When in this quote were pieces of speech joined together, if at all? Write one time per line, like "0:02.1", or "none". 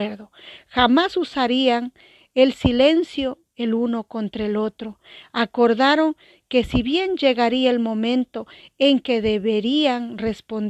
none